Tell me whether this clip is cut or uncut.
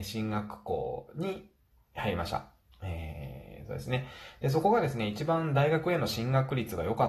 uncut